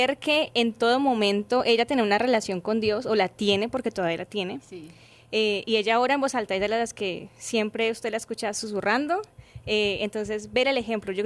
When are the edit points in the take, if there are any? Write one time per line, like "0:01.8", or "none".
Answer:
none